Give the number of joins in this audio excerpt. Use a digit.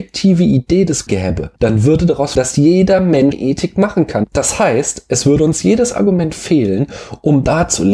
4